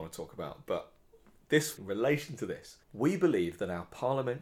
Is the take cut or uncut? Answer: cut